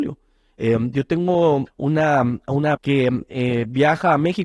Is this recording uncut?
no; 2 cuts; at 1.7 s, 2.7 s

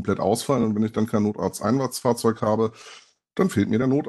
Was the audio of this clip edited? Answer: no; 0 cuts

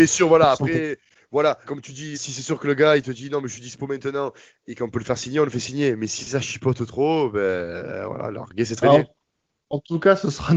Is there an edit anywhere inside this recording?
yes; 2 cuts; at 1.6 s, 2.1 s

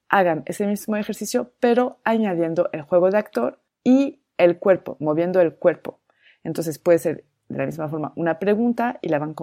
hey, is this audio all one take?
yes; 0 cuts

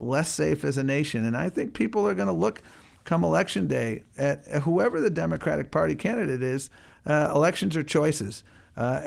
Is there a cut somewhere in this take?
no; 0 cuts

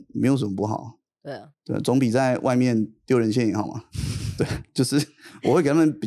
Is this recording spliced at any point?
yes; 1 cut; at 1.5 s

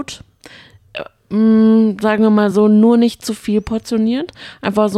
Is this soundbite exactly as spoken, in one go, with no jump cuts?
yes; 0 cuts

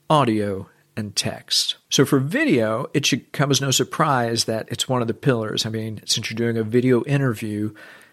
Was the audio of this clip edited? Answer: yes; 1 cut; at 1.8 s

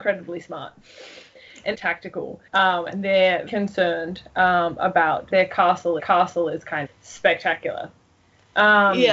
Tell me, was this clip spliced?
yes; 6 cuts; at 1.7 s, 2.5 s, 3.5 s, 5.3 s, 6.0 s, 6.8 s

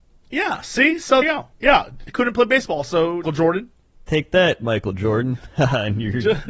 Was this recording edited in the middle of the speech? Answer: yes; 4 cuts; at 1.2 s, 1.5 s, 2.1 s, 3.2 s

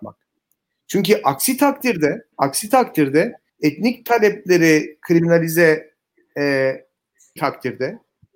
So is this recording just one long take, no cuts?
no; 3 cuts; at 2.3 s, 3.5 s, 7.4 s

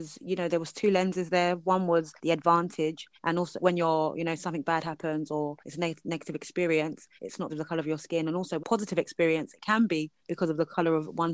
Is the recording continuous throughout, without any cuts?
no; 8 cuts; at 2.2 s, 3.2 s, 3.6 s, 5.6 s, 7.2 s, 7.5 s, 8.6 s, 10.2 s

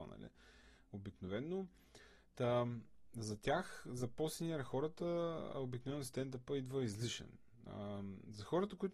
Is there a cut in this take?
no; 0 cuts

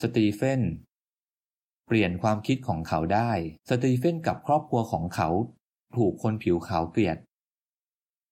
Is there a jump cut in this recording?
yes; 1 cut; at 3.6 s

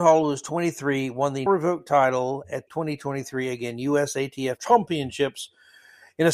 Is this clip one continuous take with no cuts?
no; 3 cuts; at 1.5 s, 2.7 s, 4.6 s

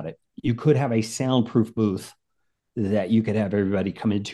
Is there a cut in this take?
no; 0 cuts

